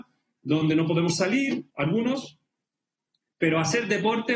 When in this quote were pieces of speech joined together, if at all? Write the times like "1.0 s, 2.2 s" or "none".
1.7 s